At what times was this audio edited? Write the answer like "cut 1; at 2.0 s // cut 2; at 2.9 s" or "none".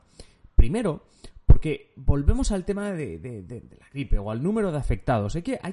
none